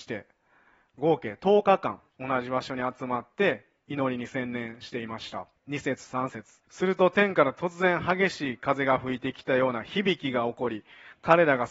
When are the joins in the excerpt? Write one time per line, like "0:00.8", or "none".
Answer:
0:02.1
0:05.6
0:06.6